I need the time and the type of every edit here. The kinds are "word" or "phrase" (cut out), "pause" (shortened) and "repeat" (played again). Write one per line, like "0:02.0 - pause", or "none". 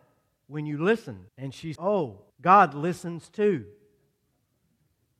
0:01.3 - pause
0:01.8 - word
0:02.3 - pause